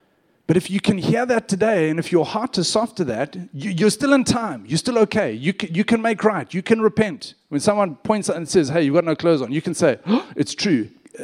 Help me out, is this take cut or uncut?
uncut